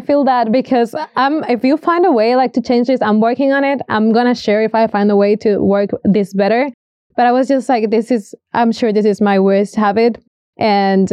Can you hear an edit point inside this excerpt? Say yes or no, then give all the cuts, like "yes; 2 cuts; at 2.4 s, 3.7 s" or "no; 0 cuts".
no; 0 cuts